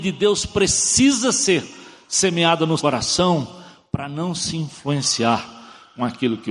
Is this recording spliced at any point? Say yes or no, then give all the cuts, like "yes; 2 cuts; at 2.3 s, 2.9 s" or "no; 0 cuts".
yes; 1 cut; at 2.8 s